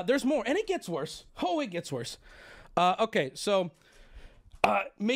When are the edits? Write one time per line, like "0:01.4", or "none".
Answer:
0:01.3